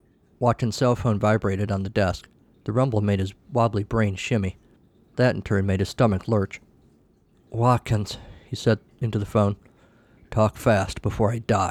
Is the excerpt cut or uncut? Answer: uncut